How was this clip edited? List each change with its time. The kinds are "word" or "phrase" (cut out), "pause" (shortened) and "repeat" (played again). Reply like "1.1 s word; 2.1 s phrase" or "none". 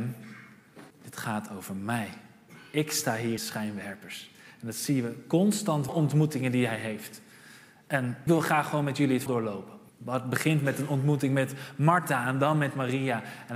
0.9 s pause; 3.4 s phrase; 5.9 s phrase; 8.3 s word; 9.3 s word; 9.9 s pause

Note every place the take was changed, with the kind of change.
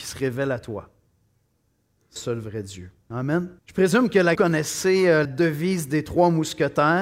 2.2 s word; 3.6 s pause; 4.3 s phrase; 5.2 s word

